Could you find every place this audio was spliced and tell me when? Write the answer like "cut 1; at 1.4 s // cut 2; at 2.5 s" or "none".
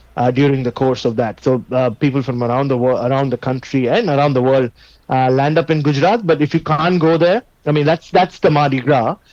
none